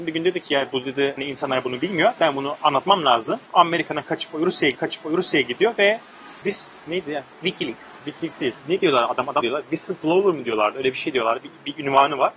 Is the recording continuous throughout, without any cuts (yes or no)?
no